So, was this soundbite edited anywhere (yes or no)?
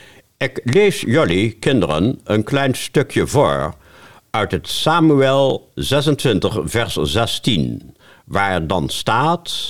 no